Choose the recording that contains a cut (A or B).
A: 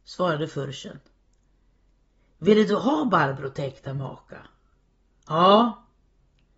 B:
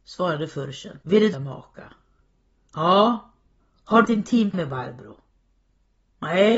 B